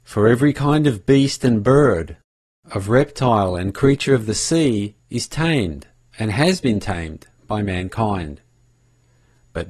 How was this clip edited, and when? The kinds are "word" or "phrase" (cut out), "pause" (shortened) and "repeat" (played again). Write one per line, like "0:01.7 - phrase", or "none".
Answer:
0:05.0 - pause